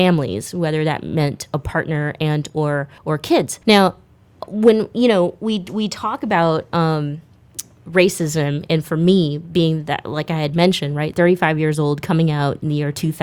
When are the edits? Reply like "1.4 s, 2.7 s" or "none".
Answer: 3.0 s, 3.6 s